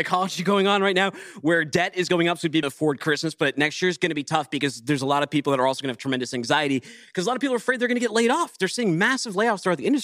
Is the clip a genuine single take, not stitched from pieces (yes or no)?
no